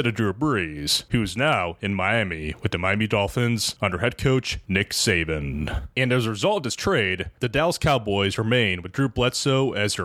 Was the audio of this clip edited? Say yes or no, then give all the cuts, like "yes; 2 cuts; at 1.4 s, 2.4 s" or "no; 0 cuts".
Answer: no; 0 cuts